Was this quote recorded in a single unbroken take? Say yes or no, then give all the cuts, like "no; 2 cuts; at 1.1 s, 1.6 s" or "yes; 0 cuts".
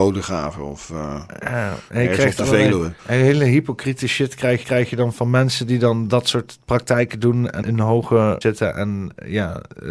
no; 4 cuts; at 3.0 s, 4.6 s, 7.6 s, 8.4 s